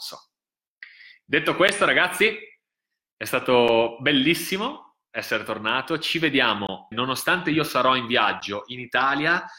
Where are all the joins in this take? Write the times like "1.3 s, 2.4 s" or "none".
6.9 s